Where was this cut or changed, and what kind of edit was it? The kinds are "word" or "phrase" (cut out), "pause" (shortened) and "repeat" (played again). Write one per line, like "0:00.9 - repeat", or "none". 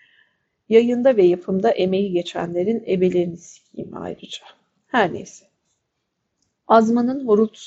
none